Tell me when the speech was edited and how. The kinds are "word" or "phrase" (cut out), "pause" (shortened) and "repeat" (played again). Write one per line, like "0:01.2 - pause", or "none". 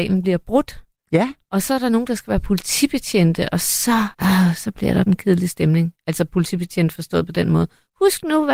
0:04.1 - pause
0:05.1 - phrase